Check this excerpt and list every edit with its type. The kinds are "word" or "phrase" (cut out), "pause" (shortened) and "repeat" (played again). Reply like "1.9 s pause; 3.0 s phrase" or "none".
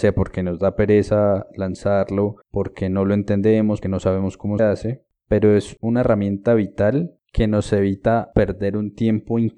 2.4 s pause; 3.8 s word; 4.6 s word